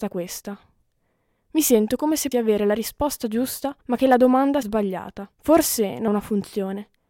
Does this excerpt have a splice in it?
yes; 5 cuts; at 2.3 s, 3.8 s, 4.6 s, 5.3 s, 6.1 s

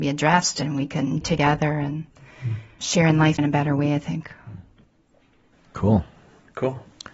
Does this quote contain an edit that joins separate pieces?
yes; 3 cuts; at 1.2 s, 2.8 s, 3.4 s

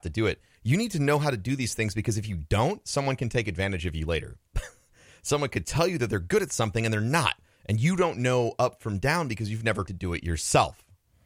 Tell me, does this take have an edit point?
yes; 1 cut; at 9.9 s

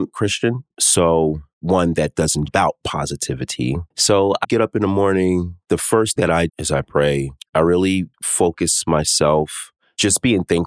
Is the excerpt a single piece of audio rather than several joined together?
no; 8 cuts; at 2.5 s, 3.9 s, 4.4 s, 5.6 s, 6.2 s, 6.5 s, 7.4 s, 8.1 s

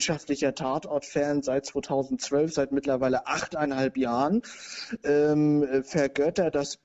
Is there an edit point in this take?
no; 0 cuts

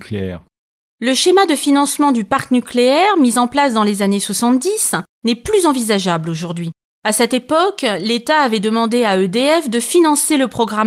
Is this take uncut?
yes; 0 cuts

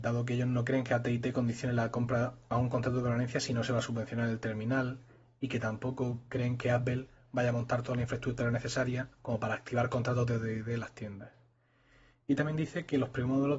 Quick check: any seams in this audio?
no; 0 cuts

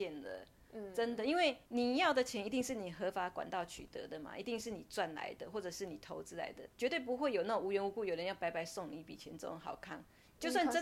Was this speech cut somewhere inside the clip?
yes; 2 cuts; at 1.6 s, 6.7 s

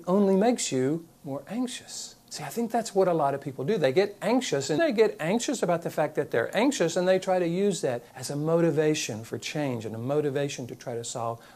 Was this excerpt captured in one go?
no; 4 cuts; at 1.2 s, 2.2 s, 4.8 s, 8.1 s

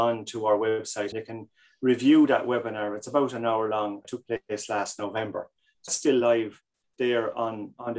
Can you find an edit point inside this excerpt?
yes; 3 cuts; at 1.1 s, 4.0 s, 5.9 s

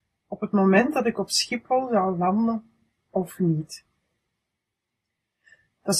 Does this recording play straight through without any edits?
yes; 0 cuts

